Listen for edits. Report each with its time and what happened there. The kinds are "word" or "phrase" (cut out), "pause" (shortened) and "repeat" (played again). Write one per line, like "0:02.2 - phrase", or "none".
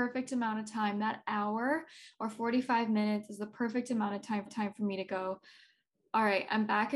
0:04.5 - repeat